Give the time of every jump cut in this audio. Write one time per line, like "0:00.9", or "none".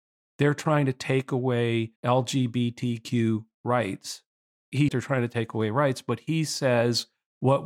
0:02.0
0:04.9